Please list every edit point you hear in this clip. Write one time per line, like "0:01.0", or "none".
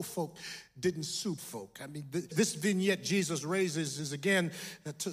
0:01.4
0:02.3